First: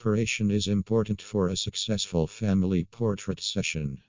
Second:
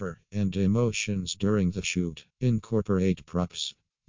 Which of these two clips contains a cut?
second; 2 cuts; at 1.8 s, 2.3 s

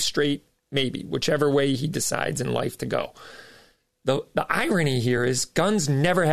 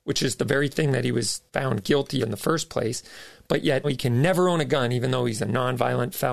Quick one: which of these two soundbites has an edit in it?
second; 3 cuts; at 1.5 s, 2.2 s, 3.8 s

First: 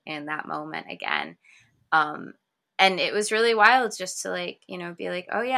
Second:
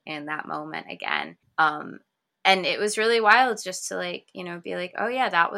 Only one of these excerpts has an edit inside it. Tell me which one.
second; 1 cut; at 1.4 s

